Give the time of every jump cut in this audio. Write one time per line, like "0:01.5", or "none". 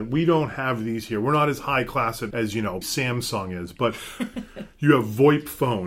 0:02.3
0:02.8